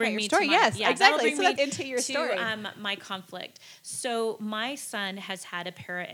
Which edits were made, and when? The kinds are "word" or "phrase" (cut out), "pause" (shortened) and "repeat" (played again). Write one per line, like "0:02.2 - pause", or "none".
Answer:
0:01.5 - word